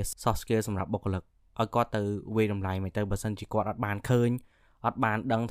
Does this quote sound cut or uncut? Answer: uncut